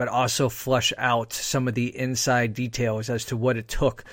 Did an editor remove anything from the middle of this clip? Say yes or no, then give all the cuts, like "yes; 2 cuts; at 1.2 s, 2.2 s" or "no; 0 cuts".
no; 0 cuts